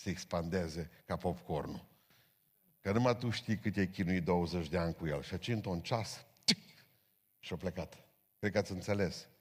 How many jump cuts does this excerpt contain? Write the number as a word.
zero